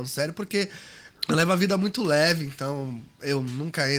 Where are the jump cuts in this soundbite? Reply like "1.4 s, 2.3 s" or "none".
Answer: 1.2 s